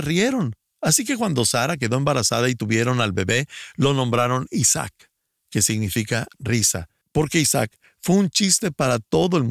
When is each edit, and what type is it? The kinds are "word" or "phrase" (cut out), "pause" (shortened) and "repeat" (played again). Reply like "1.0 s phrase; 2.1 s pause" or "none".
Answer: none